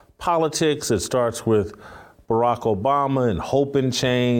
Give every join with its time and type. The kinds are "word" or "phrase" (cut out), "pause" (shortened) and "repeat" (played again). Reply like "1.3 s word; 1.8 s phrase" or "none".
none